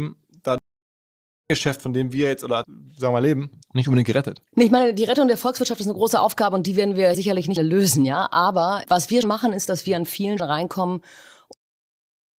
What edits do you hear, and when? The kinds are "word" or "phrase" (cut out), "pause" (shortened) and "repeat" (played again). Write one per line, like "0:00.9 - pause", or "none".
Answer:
0:02.6 - word
0:03.6 - pause
0:04.5 - pause
0:07.1 - word
0:07.6 - word
0:08.8 - word
0:09.2 - word
0:10.4 - word